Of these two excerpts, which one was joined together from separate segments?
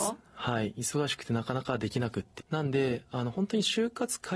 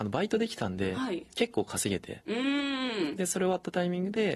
first; 1 cut; at 2.4 s

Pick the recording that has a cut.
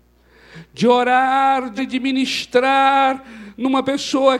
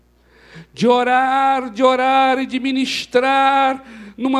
first; 1 cut; at 1.8 s

